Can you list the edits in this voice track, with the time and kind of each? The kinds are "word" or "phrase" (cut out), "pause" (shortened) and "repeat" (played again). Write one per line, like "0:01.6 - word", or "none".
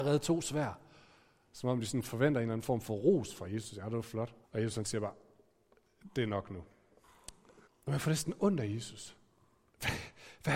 0:04.4 - pause
0:07.7 - pause